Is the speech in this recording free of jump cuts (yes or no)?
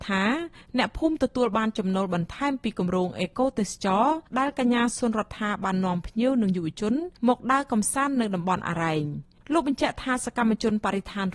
no